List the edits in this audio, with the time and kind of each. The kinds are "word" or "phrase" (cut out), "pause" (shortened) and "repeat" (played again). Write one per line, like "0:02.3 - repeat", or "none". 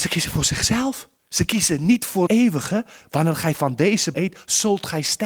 0:01.2 - pause
0:02.3 - word
0:04.1 - word